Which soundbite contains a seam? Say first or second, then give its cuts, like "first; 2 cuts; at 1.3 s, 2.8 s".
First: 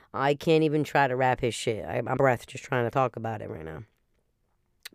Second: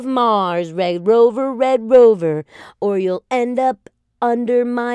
first; 2 cuts; at 2.2 s, 2.9 s